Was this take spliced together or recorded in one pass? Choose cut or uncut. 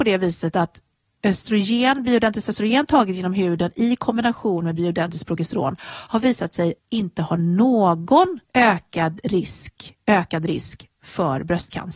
cut